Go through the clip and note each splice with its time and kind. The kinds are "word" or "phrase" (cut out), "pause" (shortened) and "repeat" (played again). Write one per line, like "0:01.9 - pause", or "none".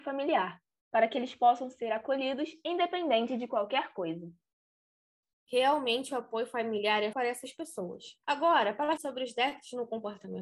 0:07.1 - word
0:08.2 - pause
0:09.0 - word